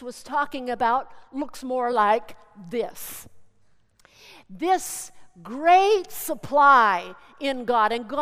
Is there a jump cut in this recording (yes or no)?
no